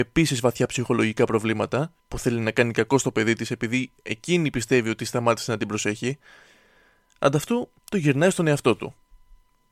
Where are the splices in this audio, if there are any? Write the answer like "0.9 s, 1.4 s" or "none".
2.0 s, 7.8 s